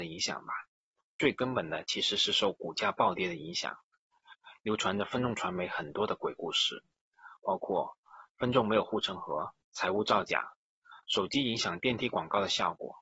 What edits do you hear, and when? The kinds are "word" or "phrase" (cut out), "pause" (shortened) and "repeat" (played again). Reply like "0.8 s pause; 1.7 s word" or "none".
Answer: 1.0 s pause; 9.6 s pause; 11.0 s pause